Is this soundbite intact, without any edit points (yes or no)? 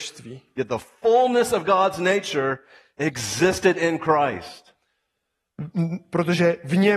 yes